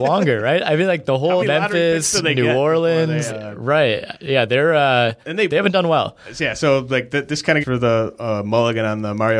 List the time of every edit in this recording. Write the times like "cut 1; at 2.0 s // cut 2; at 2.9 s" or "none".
cut 1; at 1.4 s // cut 2; at 3.3 s // cut 3; at 5.2 s // cut 4; at 7.6 s

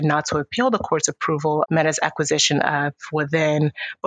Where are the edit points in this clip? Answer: cut 1; at 1.6 s

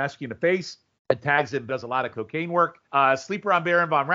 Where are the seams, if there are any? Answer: cut 1; at 1.0 s // cut 2; at 1.7 s // cut 3; at 2.1 s // cut 4; at 2.8 s

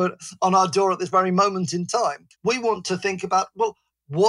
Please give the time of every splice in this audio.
cut 1; at 2.3 s

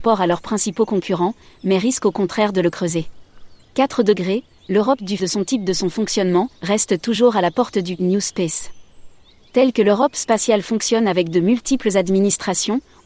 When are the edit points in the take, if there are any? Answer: cut 1; at 3.6 s // cut 2; at 5.2 s // cut 3; at 6.5 s

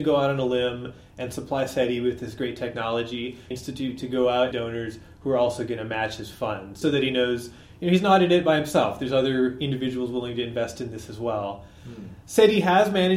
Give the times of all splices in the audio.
cut 1; at 3.5 s // cut 2; at 4.5 s // cut 3; at 6.8 s

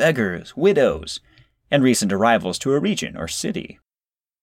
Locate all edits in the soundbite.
none

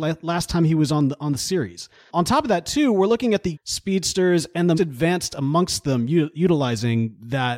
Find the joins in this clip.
cut 1; at 3.5 s // cut 2; at 4.7 s

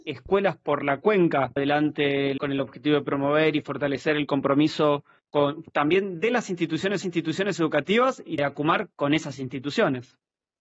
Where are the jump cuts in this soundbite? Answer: cut 1; at 1.6 s // cut 2; at 2.4 s // cut 3; at 5.2 s // cut 4; at 7.0 s // cut 5; at 8.4 s

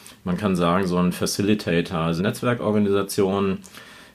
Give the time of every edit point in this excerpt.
cut 1; at 2.2 s

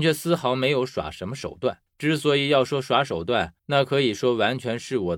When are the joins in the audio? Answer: cut 1; at 1.9 s // cut 2; at 3.6 s

